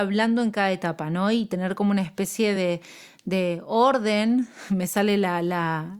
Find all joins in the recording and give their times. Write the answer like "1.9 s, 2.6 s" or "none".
none